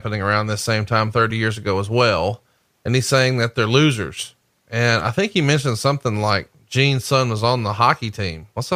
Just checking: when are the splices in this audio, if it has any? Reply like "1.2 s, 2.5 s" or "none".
none